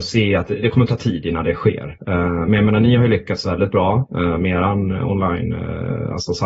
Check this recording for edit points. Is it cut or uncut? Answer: uncut